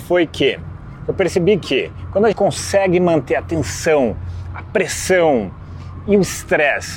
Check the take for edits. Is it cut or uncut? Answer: cut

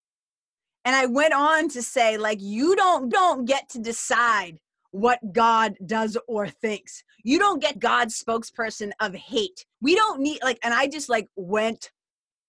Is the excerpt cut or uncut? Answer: cut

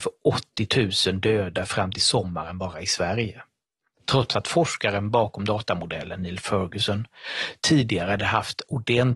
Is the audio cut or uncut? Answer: uncut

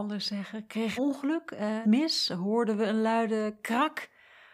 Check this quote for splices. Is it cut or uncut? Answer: cut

